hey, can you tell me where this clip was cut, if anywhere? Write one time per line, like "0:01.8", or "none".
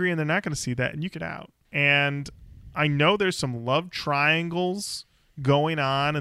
0:01.1